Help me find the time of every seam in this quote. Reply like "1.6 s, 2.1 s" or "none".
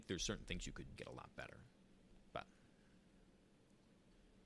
1.0 s